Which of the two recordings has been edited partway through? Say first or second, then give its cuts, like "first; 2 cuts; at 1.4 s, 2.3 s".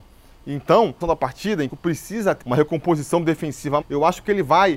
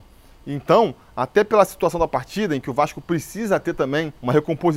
first; 4 cuts; at 1.0 s, 1.7 s, 2.4 s, 3.8 s